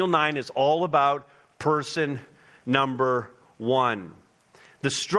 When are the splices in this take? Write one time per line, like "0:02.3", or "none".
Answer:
none